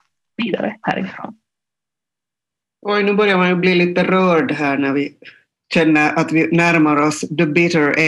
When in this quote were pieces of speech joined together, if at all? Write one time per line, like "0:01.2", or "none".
none